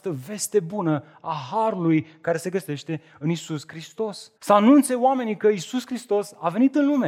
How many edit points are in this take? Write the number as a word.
one